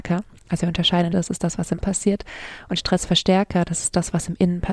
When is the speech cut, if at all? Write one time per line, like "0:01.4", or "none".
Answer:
0:01.1
0:01.8